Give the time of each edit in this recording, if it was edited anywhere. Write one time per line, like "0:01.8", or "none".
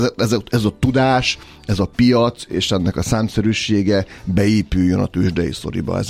none